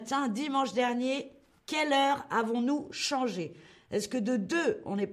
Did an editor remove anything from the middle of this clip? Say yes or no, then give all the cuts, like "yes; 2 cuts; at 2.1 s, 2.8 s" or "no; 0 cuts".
no; 0 cuts